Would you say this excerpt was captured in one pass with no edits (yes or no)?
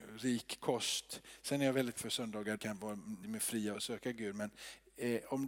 no